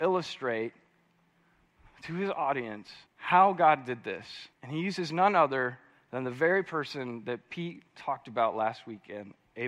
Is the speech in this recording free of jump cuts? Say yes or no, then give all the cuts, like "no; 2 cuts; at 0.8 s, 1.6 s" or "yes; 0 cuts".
no; 2 cuts; at 3.1 s, 4.5 s